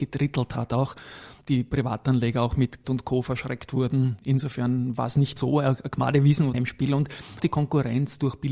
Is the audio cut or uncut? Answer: cut